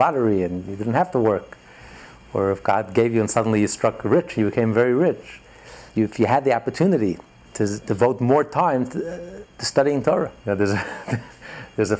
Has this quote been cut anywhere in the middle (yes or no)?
yes